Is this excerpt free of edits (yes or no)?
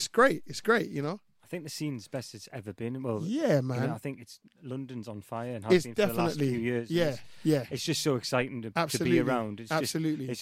yes